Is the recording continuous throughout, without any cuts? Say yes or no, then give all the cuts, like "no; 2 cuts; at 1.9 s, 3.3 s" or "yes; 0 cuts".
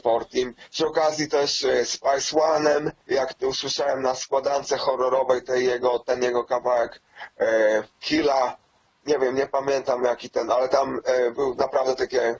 no; 2 cuts; at 3.0 s, 7.9 s